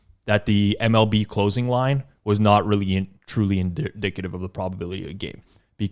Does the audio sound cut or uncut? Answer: uncut